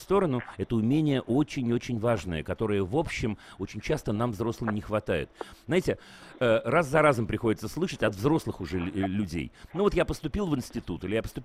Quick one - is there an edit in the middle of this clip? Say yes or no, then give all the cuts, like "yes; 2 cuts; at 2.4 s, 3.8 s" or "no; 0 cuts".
no; 0 cuts